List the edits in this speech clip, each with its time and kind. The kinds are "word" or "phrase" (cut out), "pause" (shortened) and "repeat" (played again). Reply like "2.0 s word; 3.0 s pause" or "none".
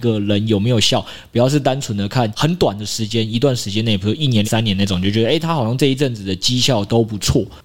4.4 s phrase